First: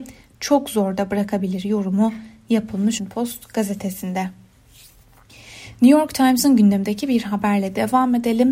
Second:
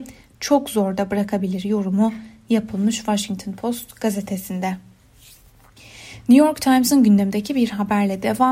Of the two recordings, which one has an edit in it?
first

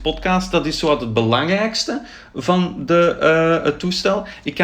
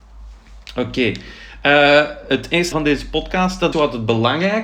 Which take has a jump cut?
second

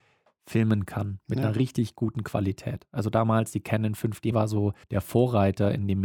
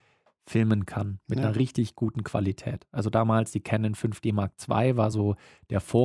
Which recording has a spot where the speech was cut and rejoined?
first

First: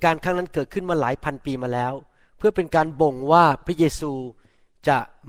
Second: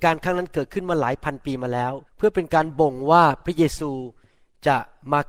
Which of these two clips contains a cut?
second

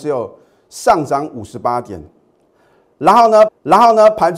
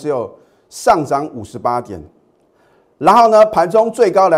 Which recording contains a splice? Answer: first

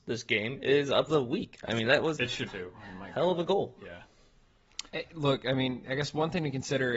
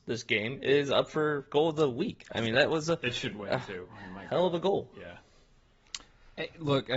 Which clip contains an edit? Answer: first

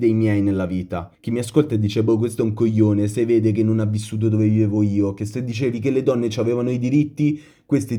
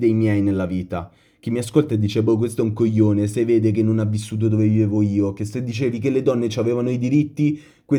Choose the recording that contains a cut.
first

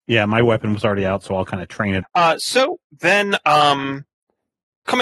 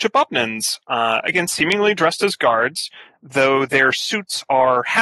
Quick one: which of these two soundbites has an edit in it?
first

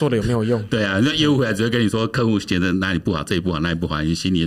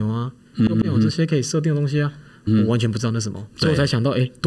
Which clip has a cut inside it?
second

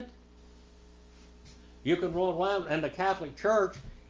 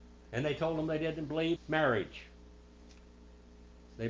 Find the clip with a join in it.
second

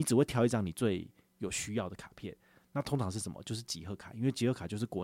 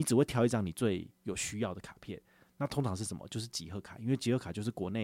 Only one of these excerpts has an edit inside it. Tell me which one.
second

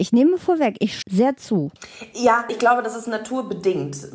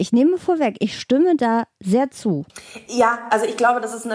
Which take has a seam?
first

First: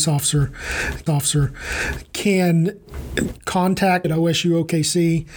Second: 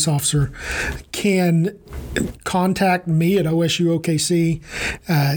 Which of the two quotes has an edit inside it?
first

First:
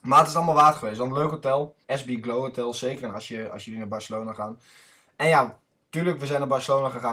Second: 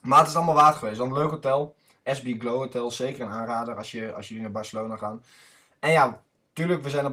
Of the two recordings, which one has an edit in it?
first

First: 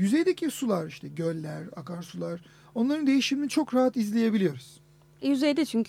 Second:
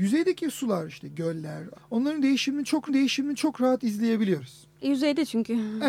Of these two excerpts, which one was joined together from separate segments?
second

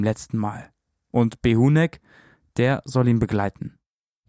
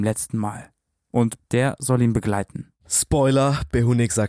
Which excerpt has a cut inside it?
second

